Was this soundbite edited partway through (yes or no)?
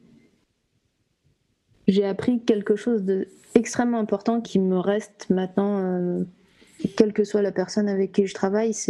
yes